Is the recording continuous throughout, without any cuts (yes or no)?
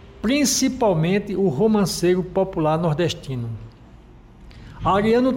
yes